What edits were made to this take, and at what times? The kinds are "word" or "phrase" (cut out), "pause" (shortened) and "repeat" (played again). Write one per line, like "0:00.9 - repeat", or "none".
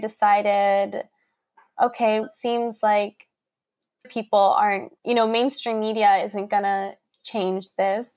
0:02.2 - word
0:04.0 - word
0:05.0 - pause

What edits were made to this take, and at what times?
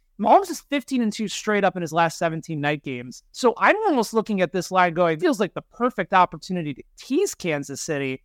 0:03.3 - pause
0:05.2 - word

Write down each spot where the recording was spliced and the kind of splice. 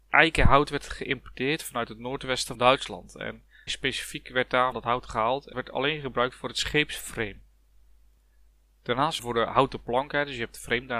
0:02.5 - word
0:03.7 - word
0:04.7 - word
0:05.5 - word
0:09.2 - word

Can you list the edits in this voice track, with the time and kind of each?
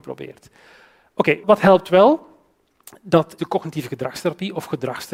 0:01.4 - word
0:03.4 - word

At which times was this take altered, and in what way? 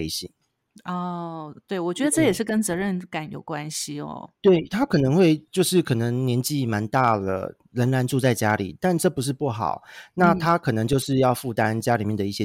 0:05.5 - pause

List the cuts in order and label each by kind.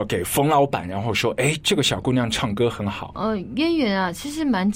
none

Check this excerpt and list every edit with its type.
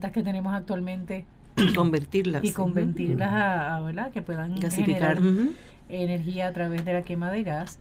0:05.2 - word

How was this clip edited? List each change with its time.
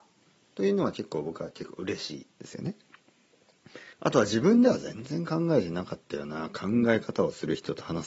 0:02.3 - pause
0:03.9 - pause

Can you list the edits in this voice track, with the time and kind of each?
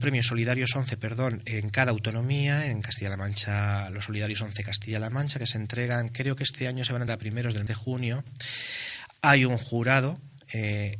0:07.1 - word
0:07.7 - word

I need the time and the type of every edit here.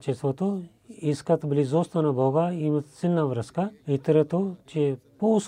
0:03.8 - pause

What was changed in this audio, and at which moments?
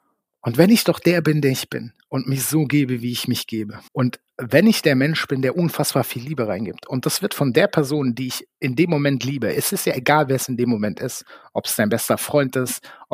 0:03.9 - pause

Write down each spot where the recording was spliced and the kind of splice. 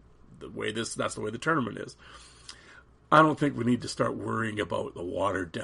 none

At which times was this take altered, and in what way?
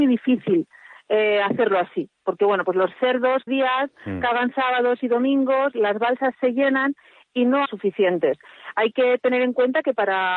0:03.5 - phrase
0:07.7 - phrase

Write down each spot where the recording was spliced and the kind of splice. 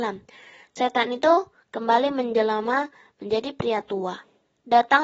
none

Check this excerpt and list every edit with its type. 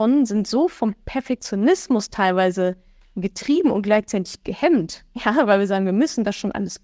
none

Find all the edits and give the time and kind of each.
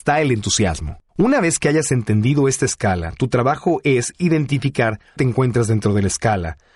0:01.1 - pause
0:05.2 - word

